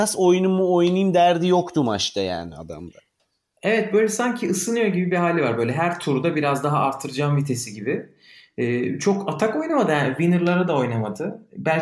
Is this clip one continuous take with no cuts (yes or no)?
yes